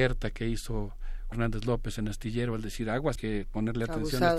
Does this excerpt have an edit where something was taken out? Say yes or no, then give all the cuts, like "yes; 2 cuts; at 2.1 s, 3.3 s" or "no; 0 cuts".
yes; 2 cuts; at 1.3 s, 3.2 s